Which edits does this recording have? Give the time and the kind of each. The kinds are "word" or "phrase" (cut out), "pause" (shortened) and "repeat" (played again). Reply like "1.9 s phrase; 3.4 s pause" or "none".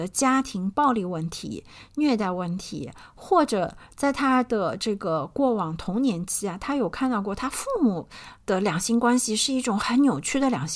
8.4 s pause

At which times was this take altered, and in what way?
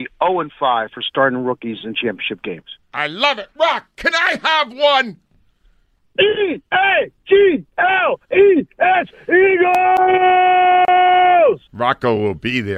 11.7 s pause

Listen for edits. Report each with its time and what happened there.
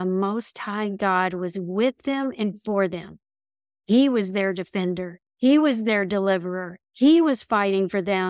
5.3 s pause; 6.8 s pause

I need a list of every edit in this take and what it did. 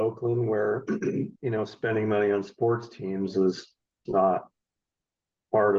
1.4 s pause; 4.1 s word

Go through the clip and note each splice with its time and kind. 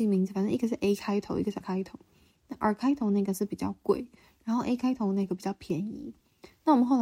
1.6 s word

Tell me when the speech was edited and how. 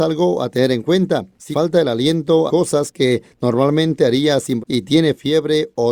1.5 s word; 2.5 s word; 4.6 s word

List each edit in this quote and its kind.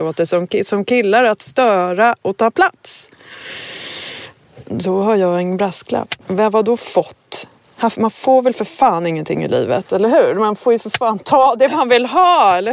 6.2 s pause

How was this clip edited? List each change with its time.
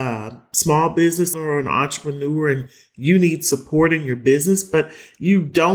1.3 s word

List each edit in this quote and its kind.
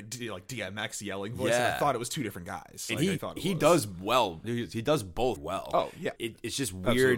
3.2 s word; 4.4 s word; 5.4 s word; 6.2 s word

